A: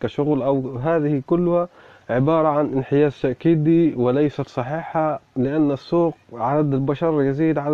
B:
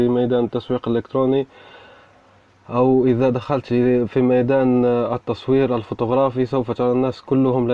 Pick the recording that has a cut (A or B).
A